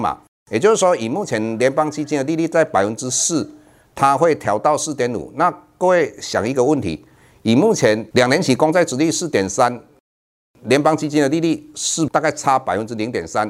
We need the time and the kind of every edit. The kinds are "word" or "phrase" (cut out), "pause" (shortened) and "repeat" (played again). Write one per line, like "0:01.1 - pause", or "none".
0:12.1 - word